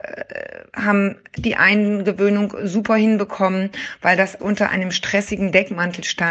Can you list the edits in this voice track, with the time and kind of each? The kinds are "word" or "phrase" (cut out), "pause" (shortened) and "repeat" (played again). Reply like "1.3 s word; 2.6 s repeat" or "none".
1.4 s word; 4.4 s word